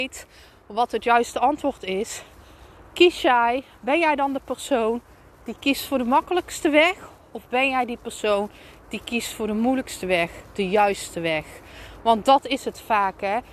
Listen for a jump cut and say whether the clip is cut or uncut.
uncut